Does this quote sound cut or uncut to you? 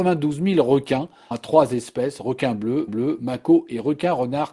cut